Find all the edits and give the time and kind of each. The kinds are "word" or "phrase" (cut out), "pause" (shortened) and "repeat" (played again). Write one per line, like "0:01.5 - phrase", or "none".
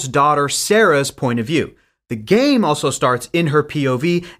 none